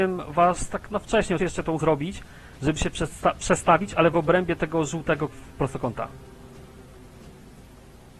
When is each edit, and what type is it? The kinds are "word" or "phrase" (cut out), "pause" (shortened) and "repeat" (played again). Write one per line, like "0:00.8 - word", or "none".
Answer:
0:01.4 - phrase
0:01.8 - word